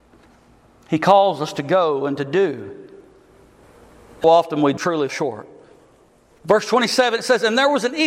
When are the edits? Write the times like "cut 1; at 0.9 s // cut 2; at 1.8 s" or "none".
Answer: cut 1; at 4.2 s // cut 2; at 4.8 s // cut 3; at 5.1 s